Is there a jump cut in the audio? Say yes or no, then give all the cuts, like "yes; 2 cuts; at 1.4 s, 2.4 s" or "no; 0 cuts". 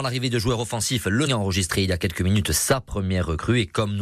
yes; 1 cut; at 1.3 s